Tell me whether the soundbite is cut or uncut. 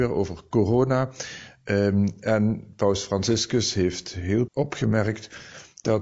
cut